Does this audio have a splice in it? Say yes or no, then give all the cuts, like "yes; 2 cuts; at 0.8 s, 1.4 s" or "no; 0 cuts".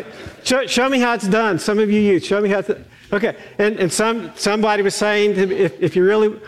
no; 0 cuts